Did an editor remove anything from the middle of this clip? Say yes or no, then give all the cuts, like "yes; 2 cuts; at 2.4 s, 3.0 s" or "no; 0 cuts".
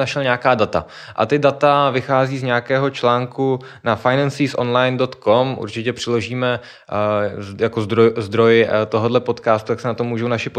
no; 0 cuts